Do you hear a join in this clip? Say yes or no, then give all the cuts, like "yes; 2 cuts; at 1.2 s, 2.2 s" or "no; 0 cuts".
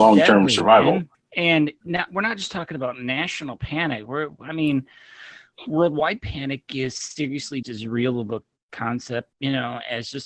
yes; 3 cuts; at 1.1 s, 7.6 s, 9.3 s